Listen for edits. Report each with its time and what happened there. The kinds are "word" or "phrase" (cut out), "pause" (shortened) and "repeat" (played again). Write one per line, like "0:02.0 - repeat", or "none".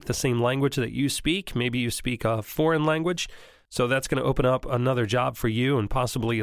none